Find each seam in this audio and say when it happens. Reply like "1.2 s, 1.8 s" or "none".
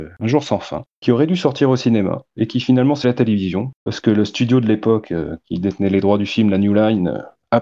3.0 s, 3.8 s